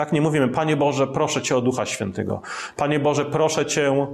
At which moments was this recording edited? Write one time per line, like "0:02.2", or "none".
none